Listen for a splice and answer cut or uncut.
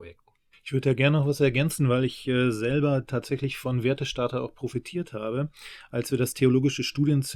uncut